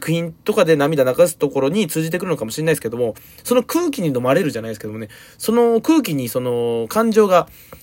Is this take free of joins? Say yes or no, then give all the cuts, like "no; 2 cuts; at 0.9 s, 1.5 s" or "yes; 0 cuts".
yes; 0 cuts